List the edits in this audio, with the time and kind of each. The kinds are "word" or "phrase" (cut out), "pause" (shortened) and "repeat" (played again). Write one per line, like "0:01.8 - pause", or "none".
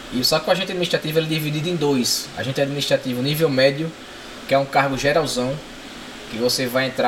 none